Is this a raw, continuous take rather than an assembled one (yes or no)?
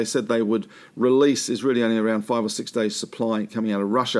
yes